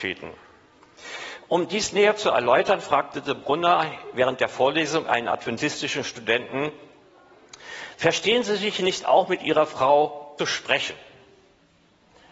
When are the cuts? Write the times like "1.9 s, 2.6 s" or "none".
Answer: 10.4 s